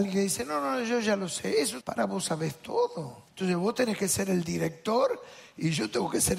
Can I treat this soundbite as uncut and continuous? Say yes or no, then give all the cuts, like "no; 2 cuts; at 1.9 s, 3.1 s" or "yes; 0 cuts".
no; 2 cuts; at 1.8 s, 3.3 s